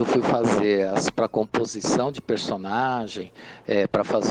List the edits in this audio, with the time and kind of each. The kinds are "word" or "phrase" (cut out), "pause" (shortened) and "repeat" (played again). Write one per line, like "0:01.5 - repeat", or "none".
0:01.1 - word